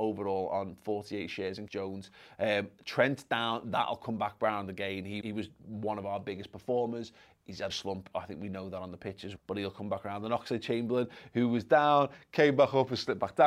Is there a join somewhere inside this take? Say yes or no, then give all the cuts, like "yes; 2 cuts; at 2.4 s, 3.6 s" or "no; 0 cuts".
yes; 4 cuts; at 1.7 s, 5.2 s, 7.7 s, 9.4 s